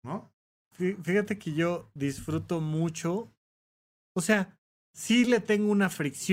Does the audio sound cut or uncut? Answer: uncut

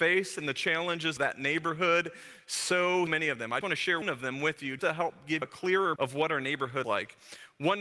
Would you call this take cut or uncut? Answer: cut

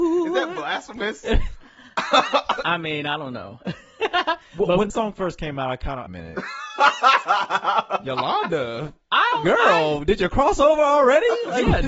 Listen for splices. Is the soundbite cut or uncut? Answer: cut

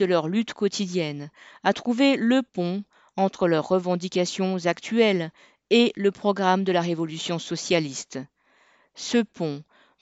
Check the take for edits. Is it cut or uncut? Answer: uncut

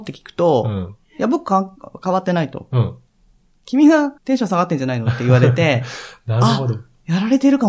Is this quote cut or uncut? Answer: cut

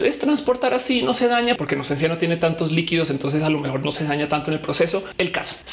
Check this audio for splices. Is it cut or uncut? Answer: uncut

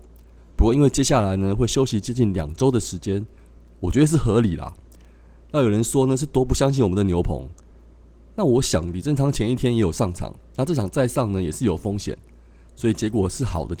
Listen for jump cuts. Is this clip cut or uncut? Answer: uncut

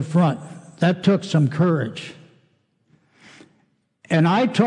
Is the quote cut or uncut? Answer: uncut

